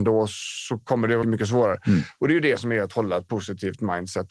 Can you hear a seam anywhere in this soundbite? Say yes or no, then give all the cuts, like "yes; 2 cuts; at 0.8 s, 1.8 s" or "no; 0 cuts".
yes; 1 cut; at 1.2 s